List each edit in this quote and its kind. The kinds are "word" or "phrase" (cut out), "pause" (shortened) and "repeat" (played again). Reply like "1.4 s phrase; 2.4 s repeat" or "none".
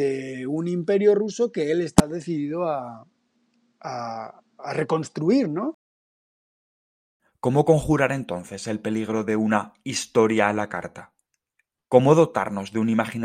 none